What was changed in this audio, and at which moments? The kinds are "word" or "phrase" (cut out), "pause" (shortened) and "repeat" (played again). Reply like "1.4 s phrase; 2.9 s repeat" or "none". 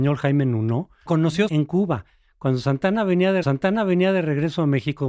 1.1 s word; 1.5 s word; 3.4 s repeat